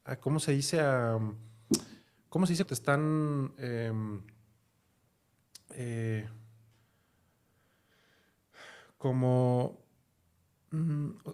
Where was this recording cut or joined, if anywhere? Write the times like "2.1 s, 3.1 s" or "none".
2.6 s